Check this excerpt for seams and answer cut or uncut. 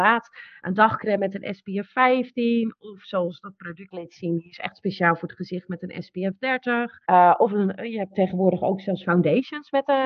cut